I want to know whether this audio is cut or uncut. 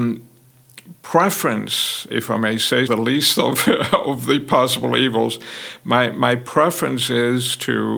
cut